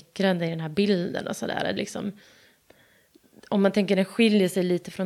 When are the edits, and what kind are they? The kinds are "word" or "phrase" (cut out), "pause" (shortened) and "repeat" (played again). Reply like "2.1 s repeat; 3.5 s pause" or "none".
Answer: 1.8 s word